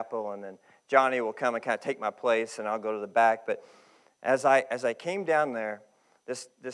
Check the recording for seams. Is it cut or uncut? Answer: uncut